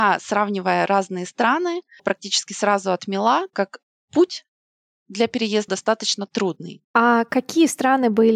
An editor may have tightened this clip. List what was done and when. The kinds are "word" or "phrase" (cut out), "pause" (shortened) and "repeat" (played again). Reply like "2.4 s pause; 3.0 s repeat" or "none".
2.0 s word; 3.5 s word; 4.1 s word; 5.7 s word